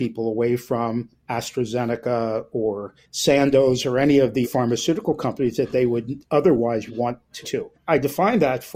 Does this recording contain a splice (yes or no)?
yes